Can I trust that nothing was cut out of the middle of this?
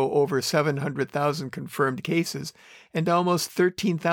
yes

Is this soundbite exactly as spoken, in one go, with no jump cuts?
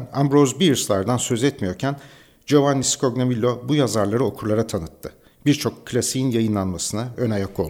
yes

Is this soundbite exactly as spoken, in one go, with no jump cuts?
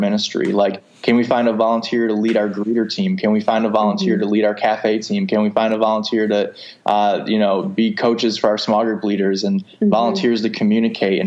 yes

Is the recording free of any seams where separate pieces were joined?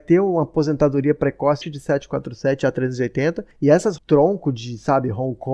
no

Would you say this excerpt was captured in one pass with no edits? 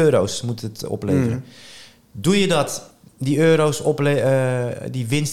yes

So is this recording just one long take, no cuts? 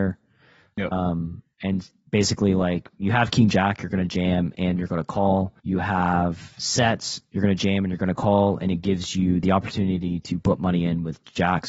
no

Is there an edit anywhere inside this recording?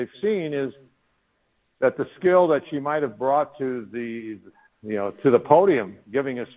no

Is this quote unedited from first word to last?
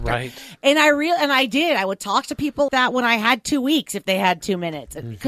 no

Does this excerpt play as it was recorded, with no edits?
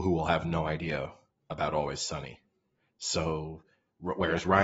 yes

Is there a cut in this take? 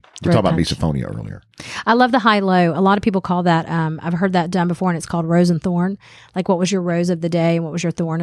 no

